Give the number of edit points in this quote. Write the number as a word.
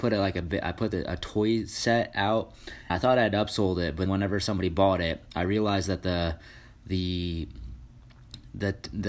two